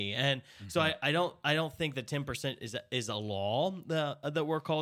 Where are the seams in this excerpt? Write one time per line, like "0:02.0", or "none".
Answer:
none